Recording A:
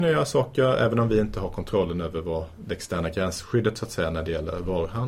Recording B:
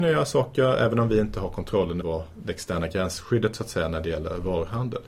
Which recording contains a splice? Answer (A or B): B